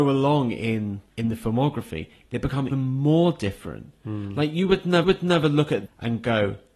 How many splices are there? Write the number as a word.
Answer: four